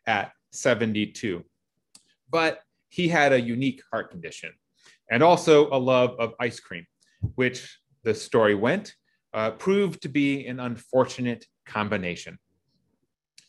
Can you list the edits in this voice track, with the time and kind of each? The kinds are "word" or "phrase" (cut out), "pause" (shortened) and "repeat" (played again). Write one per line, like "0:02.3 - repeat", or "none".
none